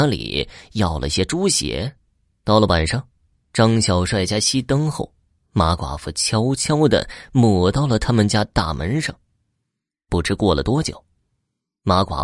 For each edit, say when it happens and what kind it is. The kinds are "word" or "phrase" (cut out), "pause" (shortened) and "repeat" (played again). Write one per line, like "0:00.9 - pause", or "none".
none